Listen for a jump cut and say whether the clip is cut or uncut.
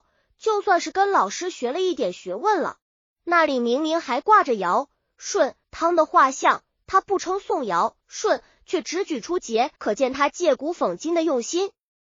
cut